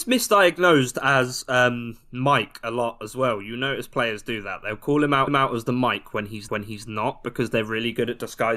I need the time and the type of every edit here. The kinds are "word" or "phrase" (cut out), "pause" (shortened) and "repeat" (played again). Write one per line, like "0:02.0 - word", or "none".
0:05.3 - repeat
0:06.5 - repeat